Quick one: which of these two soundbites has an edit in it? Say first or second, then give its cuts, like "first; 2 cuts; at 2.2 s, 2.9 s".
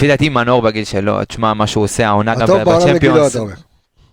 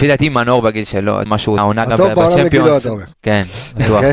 second; 3 cuts; at 1.3 s, 1.6 s, 3.1 s